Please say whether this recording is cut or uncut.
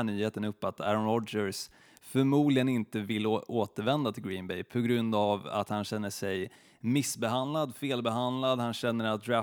uncut